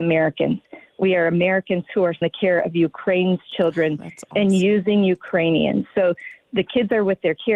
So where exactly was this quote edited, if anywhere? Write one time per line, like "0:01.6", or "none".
0:02.2